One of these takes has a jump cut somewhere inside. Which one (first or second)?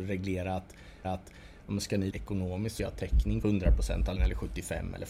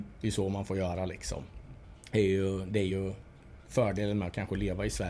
first